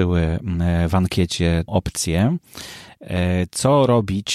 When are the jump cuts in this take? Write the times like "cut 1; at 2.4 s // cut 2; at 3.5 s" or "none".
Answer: cut 1; at 1.7 s